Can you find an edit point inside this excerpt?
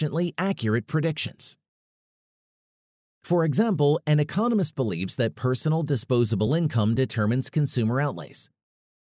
no; 0 cuts

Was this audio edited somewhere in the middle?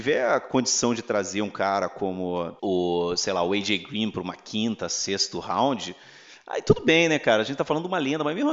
yes; 1 cut; at 2.6 s

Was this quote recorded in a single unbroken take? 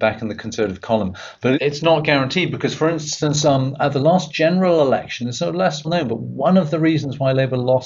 no; 2 cuts; at 1.5 s, 5.8 s

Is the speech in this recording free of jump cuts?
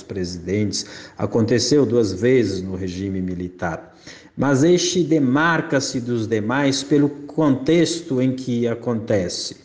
yes; 0 cuts

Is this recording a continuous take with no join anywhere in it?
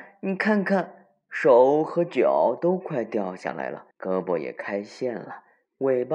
no; 1 cut; at 3.9 s

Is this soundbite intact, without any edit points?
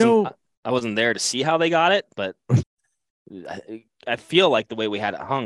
no; 1 cut; at 2.6 s

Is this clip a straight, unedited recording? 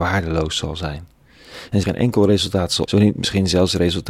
no; 2 cuts; at 1.8 s, 2.9 s

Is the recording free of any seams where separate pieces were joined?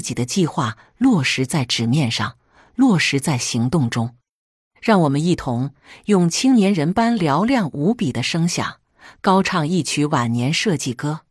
yes; 0 cuts

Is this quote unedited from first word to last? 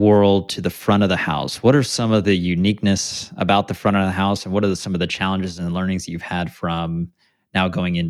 yes; 0 cuts

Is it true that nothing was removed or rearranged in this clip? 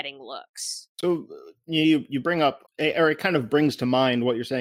no; 2 cuts; at 0.9 s, 2.7 s

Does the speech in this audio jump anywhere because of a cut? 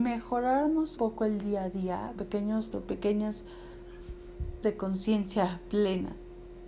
yes; 4 cuts; at 1.0 s, 2.2 s, 2.7 s, 4.6 s

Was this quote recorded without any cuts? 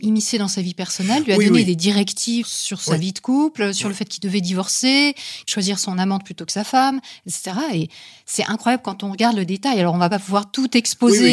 yes; 0 cuts

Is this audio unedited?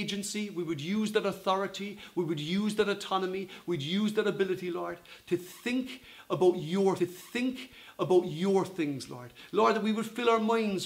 no; 1 cut; at 7.0 s

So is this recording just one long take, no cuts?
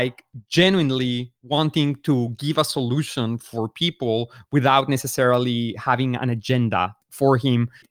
no; 1 cut; at 1.4 s

